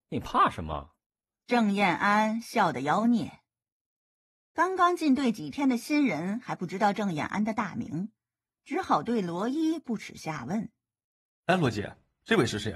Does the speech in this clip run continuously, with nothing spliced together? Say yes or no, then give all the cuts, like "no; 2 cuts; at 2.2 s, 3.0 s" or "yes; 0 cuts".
yes; 0 cuts